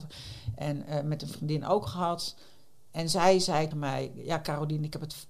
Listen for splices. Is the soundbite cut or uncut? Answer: cut